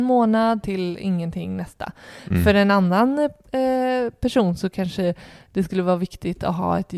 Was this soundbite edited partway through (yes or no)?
no